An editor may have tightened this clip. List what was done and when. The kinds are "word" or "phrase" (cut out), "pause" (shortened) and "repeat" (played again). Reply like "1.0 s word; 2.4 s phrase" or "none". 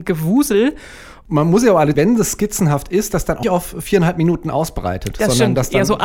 1.9 s phrase; 3.4 s word